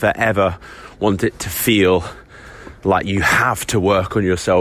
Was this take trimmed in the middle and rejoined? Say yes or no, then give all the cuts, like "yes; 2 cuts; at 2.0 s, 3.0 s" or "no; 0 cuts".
no; 0 cuts